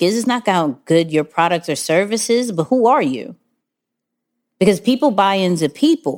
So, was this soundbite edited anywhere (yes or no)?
no